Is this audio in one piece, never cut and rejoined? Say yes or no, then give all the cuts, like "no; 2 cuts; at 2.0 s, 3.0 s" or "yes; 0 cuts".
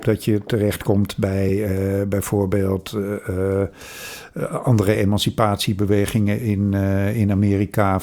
yes; 0 cuts